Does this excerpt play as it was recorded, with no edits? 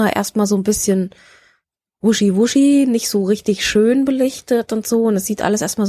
yes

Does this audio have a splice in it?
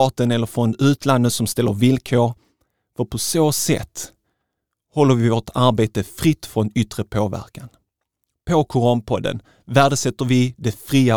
no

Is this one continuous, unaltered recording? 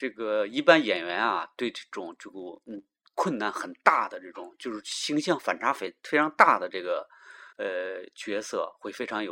no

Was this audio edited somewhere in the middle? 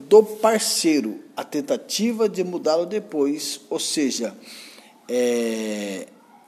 no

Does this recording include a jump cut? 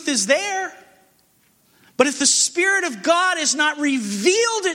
no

